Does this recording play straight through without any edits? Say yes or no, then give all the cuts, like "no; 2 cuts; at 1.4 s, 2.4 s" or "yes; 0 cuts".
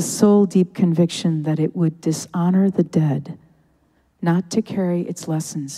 yes; 0 cuts